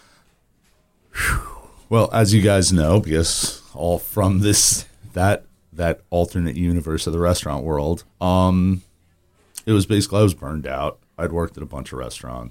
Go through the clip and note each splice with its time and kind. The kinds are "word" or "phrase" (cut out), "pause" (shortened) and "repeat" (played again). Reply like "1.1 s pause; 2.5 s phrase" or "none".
8.1 s pause